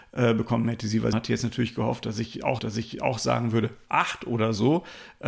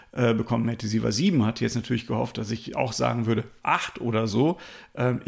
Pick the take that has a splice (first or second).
first